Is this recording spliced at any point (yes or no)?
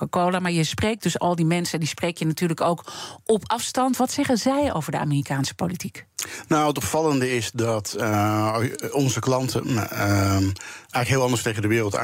no